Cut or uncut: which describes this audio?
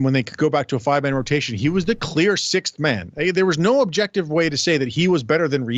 uncut